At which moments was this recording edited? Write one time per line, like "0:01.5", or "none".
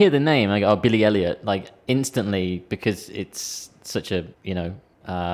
0:04.3